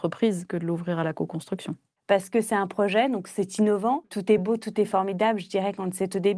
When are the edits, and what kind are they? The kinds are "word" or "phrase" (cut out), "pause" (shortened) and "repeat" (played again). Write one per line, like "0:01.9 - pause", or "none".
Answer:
none